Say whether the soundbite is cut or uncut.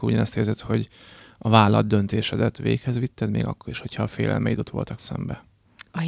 cut